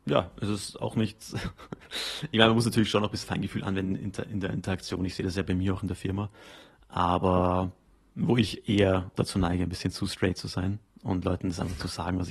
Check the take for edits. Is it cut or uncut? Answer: cut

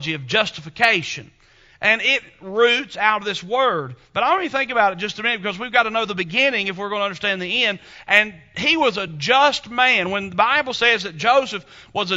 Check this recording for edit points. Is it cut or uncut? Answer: uncut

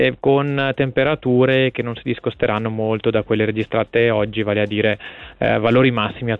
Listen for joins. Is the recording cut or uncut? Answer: uncut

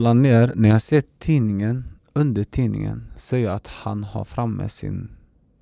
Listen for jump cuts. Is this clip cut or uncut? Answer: uncut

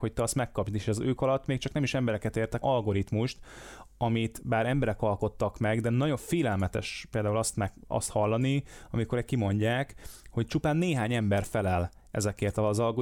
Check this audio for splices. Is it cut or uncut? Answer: cut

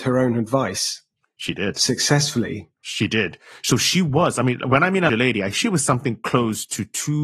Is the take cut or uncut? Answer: cut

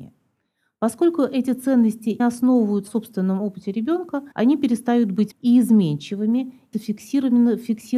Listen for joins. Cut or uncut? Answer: cut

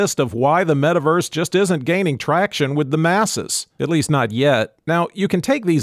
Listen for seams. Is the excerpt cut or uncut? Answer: uncut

